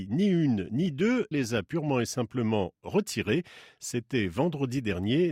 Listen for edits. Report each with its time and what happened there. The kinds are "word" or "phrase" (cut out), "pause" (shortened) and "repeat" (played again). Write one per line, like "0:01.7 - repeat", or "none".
0:01.3 - word